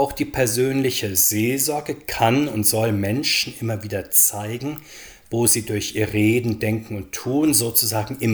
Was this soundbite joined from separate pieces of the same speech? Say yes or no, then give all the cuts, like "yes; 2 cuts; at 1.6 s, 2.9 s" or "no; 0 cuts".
no; 0 cuts